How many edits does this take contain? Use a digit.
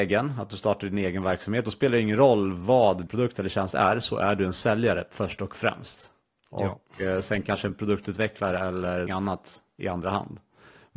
2